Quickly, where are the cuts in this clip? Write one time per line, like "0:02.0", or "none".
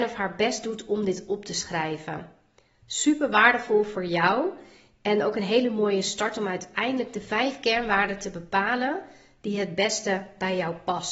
none